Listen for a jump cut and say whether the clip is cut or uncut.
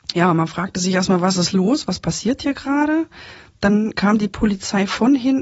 uncut